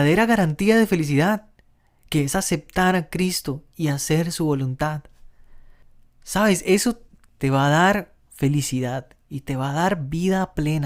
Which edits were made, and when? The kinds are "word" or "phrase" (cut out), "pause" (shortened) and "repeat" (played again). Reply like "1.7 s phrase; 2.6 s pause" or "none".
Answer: none